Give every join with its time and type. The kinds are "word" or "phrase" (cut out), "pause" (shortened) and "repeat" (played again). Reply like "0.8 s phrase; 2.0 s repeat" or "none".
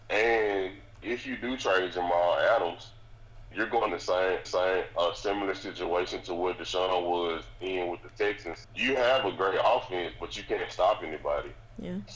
1.0 s word; 3.5 s word; 3.9 s phrase; 4.4 s repeat; 8.6 s phrase